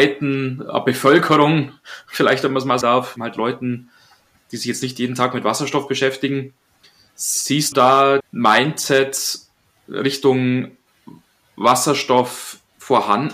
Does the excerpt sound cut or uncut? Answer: cut